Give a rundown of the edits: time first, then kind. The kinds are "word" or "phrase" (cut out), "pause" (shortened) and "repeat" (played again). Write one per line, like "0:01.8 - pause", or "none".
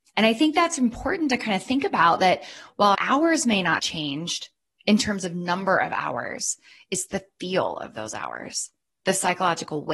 0:02.9 - word
0:03.8 - word